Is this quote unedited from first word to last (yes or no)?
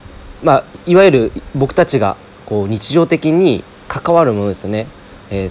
yes